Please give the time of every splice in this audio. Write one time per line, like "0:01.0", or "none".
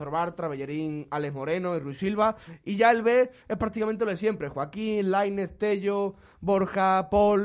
none